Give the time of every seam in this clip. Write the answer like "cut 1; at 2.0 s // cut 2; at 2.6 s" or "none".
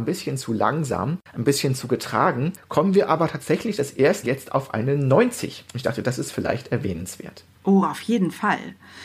cut 1; at 4.2 s